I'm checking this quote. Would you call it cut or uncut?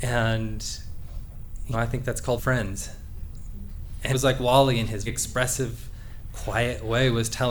cut